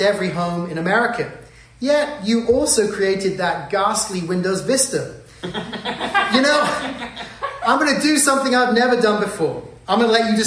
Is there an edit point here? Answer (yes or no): no